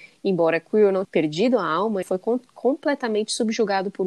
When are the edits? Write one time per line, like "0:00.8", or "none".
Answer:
0:01.0
0:02.0